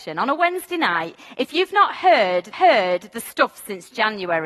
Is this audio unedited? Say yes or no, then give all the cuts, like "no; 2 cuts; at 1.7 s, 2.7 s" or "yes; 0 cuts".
no; 1 cut; at 2.5 s